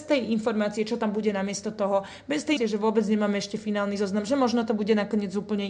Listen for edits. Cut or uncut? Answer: cut